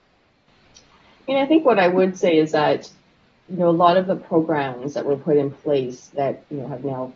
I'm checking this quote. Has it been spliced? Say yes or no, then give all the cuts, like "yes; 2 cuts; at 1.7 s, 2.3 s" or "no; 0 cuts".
no; 0 cuts